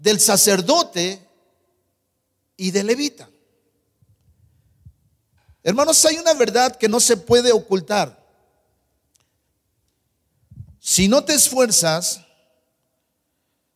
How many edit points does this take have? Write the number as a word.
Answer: zero